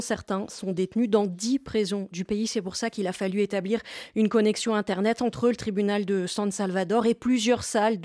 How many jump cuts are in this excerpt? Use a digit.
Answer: 0